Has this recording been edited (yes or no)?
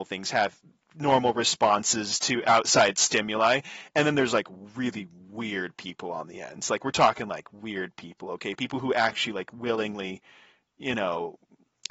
no